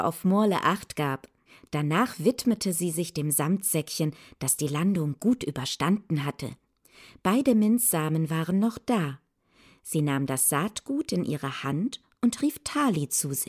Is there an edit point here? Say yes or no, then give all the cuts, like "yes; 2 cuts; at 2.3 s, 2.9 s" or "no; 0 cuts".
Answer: no; 0 cuts